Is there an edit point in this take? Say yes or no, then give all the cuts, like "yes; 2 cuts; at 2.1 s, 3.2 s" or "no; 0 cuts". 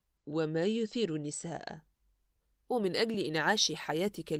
no; 0 cuts